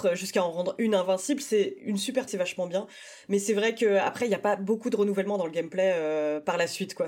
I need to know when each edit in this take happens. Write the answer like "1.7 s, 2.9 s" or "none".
2.3 s